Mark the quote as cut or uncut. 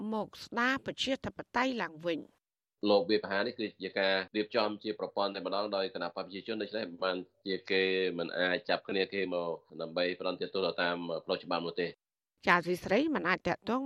uncut